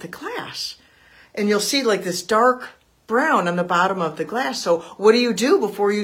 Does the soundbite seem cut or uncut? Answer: uncut